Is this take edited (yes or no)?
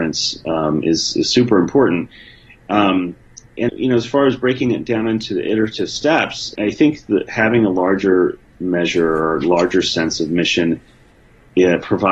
yes